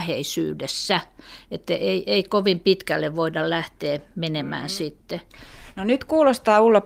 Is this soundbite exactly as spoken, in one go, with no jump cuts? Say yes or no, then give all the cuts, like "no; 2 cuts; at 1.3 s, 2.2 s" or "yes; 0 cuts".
yes; 0 cuts